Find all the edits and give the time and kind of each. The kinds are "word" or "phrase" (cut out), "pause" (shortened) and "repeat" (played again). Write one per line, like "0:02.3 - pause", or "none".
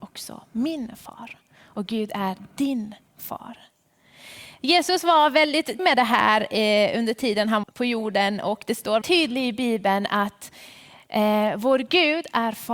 0:05.8 - word
0:07.6 - word
0:09.0 - word

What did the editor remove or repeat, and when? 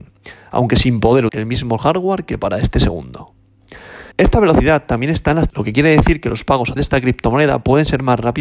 0:01.3 - word
0:04.1 - pause
0:05.5 - word
0:06.8 - word

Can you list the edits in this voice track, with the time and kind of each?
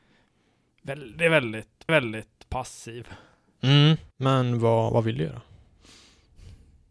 0:01.9 - repeat
0:04.1 - pause

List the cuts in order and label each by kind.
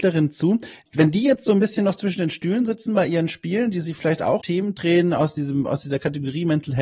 0:04.4 - word

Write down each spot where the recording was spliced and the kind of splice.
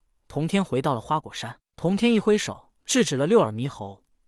0:02.8 - pause

